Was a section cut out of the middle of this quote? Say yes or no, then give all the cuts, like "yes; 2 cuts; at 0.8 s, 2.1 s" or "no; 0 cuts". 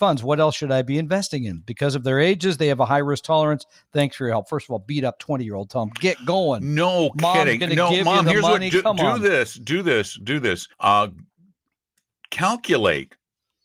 yes; 2 cuts; at 5.2 s, 10.7 s